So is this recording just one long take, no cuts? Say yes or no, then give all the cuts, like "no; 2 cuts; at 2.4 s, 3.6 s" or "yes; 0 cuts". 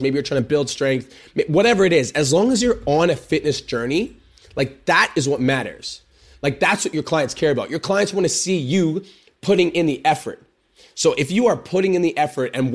yes; 0 cuts